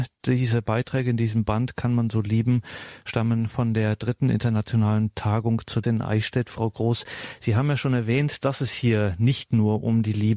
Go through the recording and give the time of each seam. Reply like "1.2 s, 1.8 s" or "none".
5.8 s